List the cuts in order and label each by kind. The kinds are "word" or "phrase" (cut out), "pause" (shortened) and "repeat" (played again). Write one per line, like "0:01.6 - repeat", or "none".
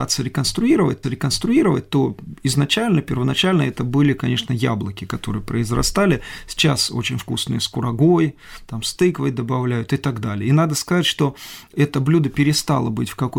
0:01.0 - repeat
0:11.7 - word

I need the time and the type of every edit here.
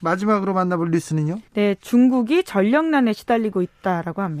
0:01.5 - pause

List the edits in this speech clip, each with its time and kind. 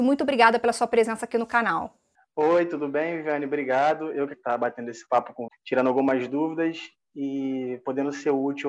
0:02.2 - pause
0:04.3 - phrase
0:05.5 - word

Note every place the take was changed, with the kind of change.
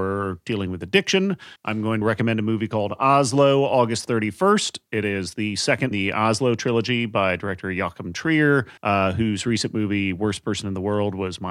0:01.6 - pause
0:02.0 - word
0:05.9 - phrase
0:08.8 - pause

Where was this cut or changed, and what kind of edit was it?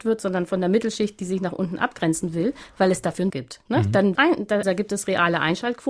0:03.3 - word
0:04.1 - word
0:04.6 - word

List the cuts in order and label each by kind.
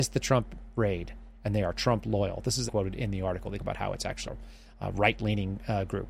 0:02.7 - word
0:03.6 - word
0:04.3 - word

